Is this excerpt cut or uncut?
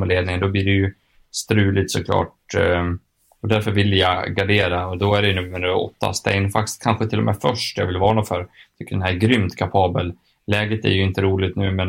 uncut